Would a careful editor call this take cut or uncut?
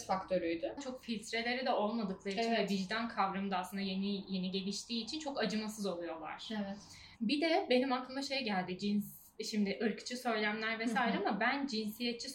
cut